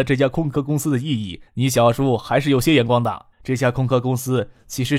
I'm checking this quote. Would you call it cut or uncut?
cut